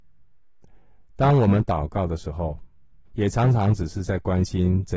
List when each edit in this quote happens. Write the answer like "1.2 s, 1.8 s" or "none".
3.1 s

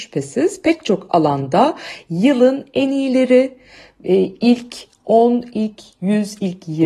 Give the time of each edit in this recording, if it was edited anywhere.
none

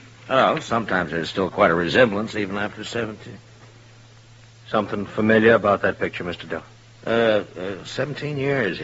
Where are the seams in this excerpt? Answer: none

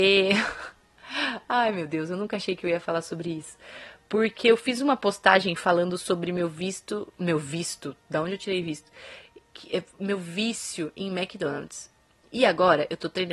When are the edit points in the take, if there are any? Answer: none

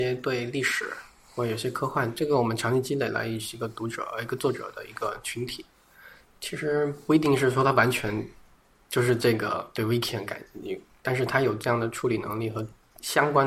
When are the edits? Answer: none

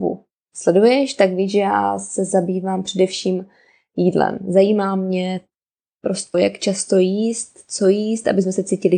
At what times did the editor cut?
6.3 s

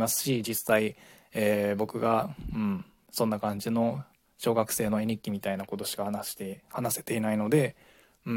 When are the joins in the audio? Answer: none

